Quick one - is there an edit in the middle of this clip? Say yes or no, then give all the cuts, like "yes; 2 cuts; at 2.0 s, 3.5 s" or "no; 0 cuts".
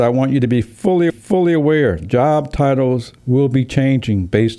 yes; 2 cuts; at 1.1 s, 3.2 s